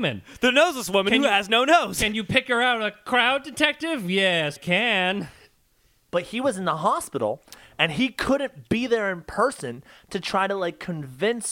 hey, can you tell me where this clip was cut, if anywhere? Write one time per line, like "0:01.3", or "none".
0:04.6